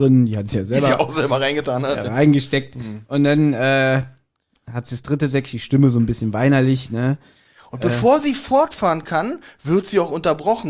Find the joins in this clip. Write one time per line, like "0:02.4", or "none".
0:05.5